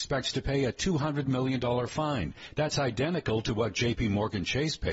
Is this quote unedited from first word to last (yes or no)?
yes